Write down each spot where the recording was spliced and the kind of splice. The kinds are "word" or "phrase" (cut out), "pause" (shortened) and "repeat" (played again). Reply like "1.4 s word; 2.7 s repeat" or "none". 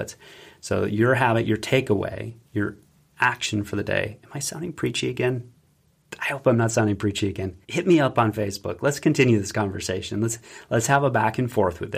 2.4 s pause; 7.6 s pause